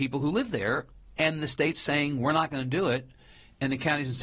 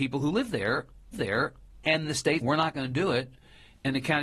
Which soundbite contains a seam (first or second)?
second